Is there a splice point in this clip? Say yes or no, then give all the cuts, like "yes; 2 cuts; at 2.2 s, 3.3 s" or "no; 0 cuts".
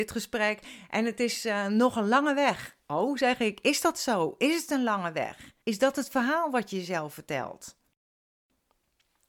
yes; 2 cuts; at 2.8 s, 5.6 s